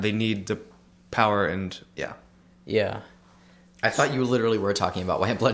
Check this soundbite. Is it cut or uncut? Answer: uncut